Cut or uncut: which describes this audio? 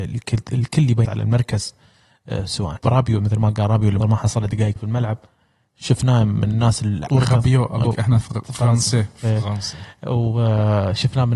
cut